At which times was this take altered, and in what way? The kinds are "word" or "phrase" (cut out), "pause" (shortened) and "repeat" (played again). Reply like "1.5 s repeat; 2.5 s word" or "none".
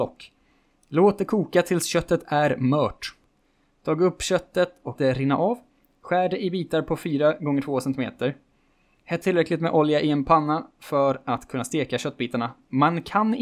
5.0 s word; 9.2 s word